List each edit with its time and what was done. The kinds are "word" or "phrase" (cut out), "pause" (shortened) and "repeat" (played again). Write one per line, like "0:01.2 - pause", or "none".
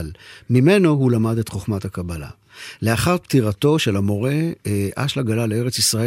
none